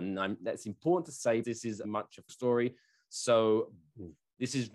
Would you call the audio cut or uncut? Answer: cut